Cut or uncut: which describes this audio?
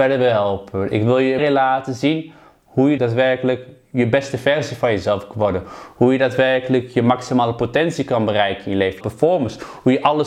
cut